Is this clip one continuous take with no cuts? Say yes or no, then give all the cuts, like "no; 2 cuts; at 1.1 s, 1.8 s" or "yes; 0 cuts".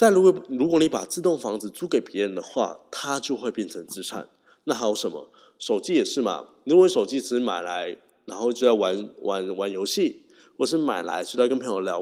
yes; 0 cuts